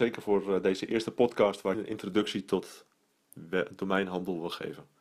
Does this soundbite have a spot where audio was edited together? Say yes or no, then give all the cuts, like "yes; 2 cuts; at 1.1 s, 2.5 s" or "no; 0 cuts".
yes; 1 cut; at 1.7 s